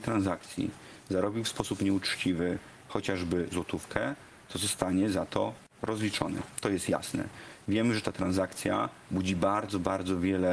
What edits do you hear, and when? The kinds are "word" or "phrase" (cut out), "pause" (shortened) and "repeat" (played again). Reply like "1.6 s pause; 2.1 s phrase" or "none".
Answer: none